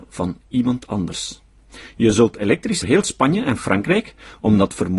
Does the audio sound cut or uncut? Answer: cut